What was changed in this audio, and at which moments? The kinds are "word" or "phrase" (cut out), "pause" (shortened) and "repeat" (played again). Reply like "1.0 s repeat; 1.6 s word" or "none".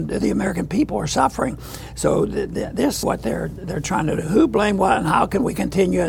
3.0 s phrase

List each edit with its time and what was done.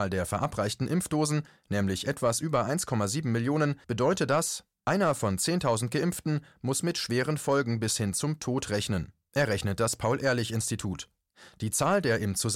3.8 s pause

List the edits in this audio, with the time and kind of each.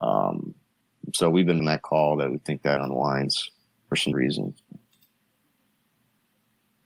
1.6 s word; 2.8 s word; 4.1 s word

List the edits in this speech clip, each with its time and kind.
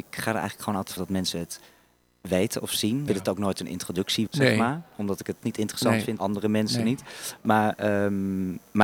1.0 s word; 3.1 s word; 4.3 s word; 5.4 s word; 6.2 s word

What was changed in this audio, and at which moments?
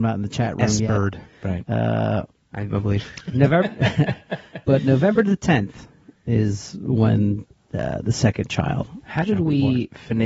none

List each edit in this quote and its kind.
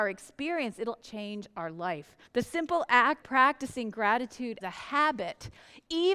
1.0 s word; 2.3 s pause; 3.2 s word; 4.6 s word

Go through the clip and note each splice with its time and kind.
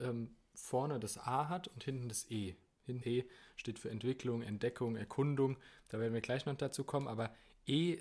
3.0 s word

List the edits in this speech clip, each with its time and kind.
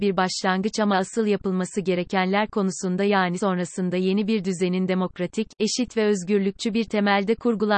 3.4 s word

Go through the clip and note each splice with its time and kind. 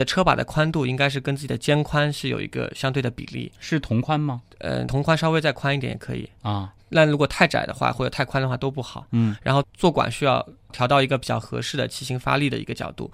4.8 s word

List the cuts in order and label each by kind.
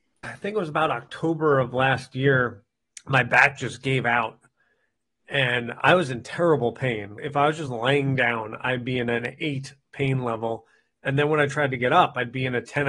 none

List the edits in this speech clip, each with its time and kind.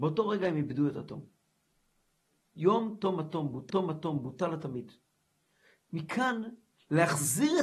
3.7 s repeat

